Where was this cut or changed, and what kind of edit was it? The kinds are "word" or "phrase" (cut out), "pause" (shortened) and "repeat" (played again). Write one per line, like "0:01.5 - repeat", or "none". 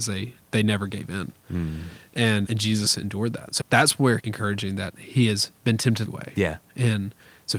0:02.4 - word
0:03.6 - word
0:04.2 - phrase
0:05.6 - pause
0:06.1 - phrase